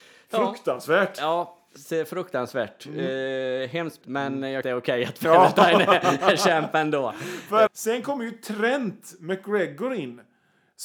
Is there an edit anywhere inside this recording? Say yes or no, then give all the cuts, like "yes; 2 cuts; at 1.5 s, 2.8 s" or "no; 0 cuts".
yes; 3 cuts; at 4.0 s, 4.6 s, 7.7 s